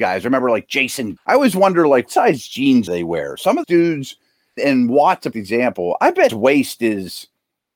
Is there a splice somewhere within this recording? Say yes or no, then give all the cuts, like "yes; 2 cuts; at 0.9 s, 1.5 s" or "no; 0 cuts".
yes; 7 cuts; at 1.2 s, 2.1 s, 2.9 s, 3.6 s, 4.6 s, 5.3 s, 6.3 s